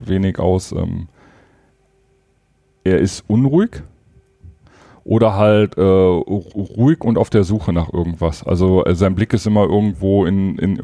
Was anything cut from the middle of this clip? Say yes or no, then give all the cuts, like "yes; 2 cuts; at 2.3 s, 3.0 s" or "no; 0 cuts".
no; 0 cuts